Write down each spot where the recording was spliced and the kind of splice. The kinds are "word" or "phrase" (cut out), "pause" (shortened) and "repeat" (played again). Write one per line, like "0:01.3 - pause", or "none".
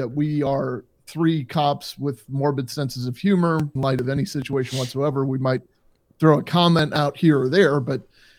0:03.8 - phrase